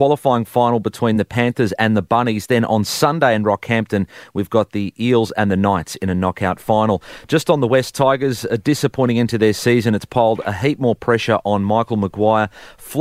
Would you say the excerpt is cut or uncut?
uncut